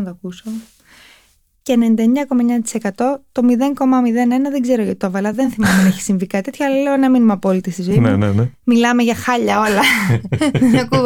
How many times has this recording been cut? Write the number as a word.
zero